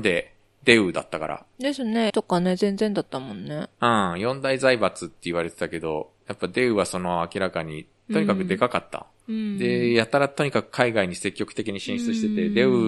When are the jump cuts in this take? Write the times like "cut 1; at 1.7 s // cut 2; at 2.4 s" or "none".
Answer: cut 1; at 2.1 s // cut 2; at 9.2 s